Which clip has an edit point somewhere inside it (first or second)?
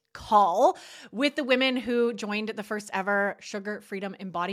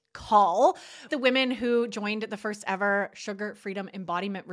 second